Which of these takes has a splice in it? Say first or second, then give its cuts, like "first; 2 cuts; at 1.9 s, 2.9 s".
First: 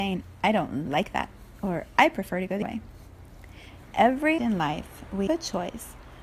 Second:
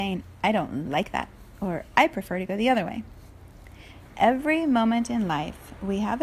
first; 3 cuts; at 2.6 s, 4.4 s, 5.3 s